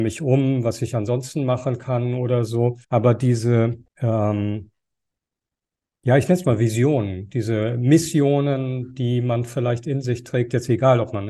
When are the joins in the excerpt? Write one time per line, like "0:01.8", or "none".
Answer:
0:02.8
0:03.9